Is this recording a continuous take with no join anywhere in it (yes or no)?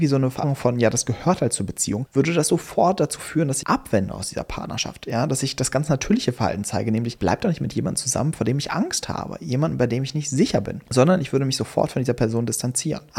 no